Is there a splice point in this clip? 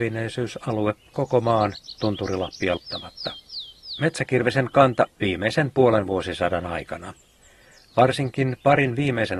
yes; 3 cuts; at 1.1 s, 2.8 s, 5.1 s

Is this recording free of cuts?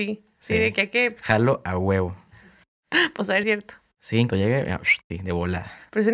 no; 3 cuts; at 3.4 s, 4.3 s, 5.1 s

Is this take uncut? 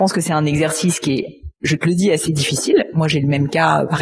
yes; 0 cuts

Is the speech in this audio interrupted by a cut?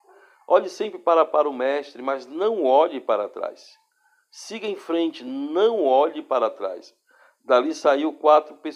no; 0 cuts

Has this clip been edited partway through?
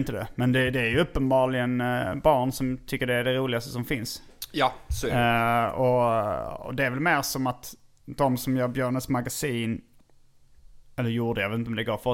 no; 0 cuts

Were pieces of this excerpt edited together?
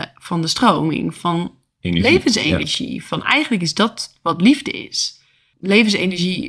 yes; 1 cut; at 1.2 s

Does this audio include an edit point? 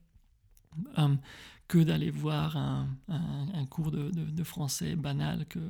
no; 0 cuts

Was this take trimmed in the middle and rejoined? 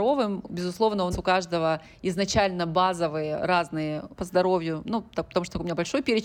yes; 2 cuts; at 1.1 s, 4.1 s

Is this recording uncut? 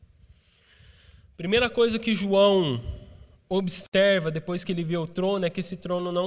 yes; 0 cuts

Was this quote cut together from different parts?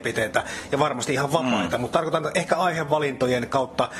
no; 0 cuts

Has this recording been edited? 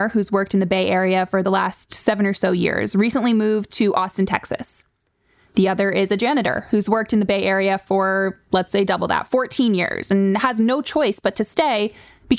no; 0 cuts

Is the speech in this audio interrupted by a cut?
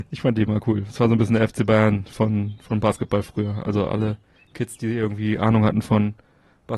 no; 0 cuts

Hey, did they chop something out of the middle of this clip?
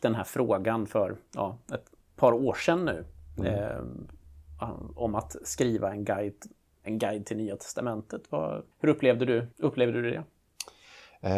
yes; 2 cuts; at 8.7 s, 9.5 s

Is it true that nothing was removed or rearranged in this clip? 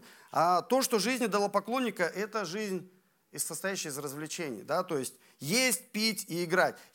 yes; 0 cuts

